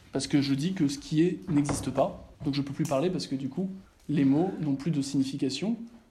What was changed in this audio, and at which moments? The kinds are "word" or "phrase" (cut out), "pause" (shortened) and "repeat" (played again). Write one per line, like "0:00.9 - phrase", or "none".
0:02.4 - pause
0:03.9 - pause